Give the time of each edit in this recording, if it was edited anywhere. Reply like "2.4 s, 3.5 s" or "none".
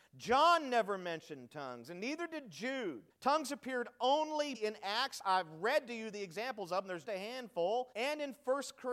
3.1 s, 4.5 s, 7.0 s, 7.9 s